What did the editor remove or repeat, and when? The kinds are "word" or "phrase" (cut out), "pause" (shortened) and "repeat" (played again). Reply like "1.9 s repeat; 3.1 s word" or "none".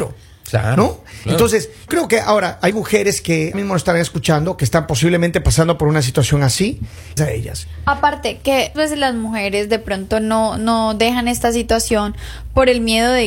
1.9 s word; 2.7 s word; 3.5 s word; 7.2 s phrase; 8.7 s word